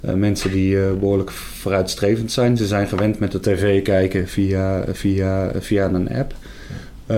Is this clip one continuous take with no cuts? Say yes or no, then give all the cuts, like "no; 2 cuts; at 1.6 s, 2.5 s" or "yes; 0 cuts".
no; 2 cuts; at 3.4 s, 4.9 s